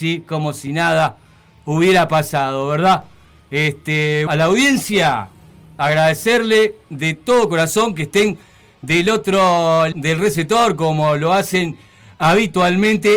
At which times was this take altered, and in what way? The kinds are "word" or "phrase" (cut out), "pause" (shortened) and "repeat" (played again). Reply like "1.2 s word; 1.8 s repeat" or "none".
4.3 s word; 9.9 s word